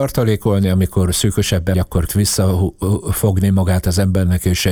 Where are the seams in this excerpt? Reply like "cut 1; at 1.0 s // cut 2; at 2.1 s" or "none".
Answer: cut 1; at 1.7 s // cut 2; at 2.1 s